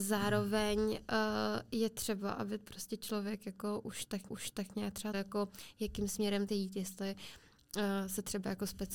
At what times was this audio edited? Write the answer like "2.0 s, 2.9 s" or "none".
4.3 s, 5.1 s, 6.5 s